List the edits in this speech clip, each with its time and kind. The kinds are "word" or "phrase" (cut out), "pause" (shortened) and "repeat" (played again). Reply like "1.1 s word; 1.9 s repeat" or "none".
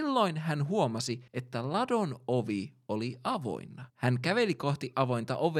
1.3 s pause; 3.9 s pause